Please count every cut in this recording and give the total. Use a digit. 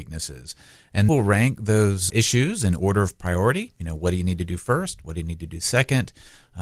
2